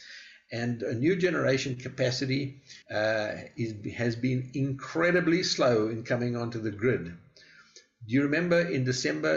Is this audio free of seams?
no; 1 cut; at 2.8 s

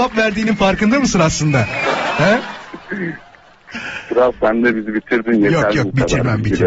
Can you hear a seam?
no; 0 cuts

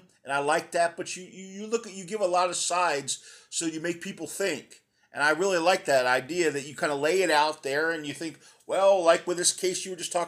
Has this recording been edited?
no; 0 cuts

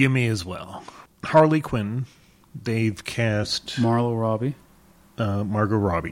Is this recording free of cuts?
yes; 0 cuts

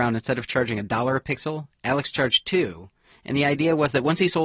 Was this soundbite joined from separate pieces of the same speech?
no; 0 cuts

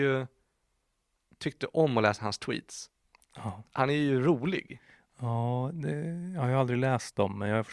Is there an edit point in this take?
no; 0 cuts

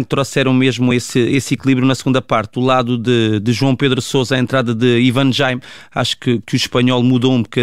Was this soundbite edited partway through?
no; 0 cuts

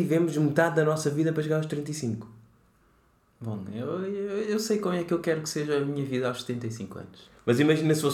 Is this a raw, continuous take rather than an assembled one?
yes; 0 cuts

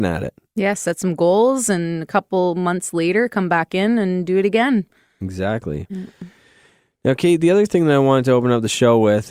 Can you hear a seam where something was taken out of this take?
no; 0 cuts

